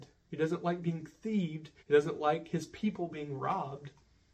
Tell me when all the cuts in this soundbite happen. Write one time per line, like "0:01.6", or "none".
0:01.8